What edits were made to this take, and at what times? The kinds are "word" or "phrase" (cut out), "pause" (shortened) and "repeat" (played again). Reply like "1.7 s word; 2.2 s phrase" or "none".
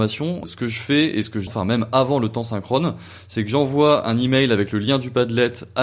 1.5 s word